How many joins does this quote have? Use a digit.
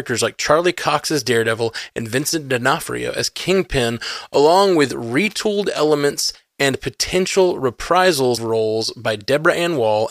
1